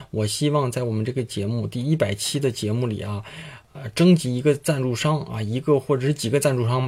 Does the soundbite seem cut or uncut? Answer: uncut